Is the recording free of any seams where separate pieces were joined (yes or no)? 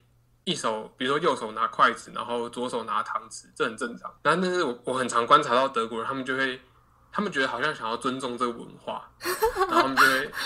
yes